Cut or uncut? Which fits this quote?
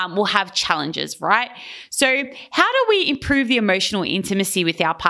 uncut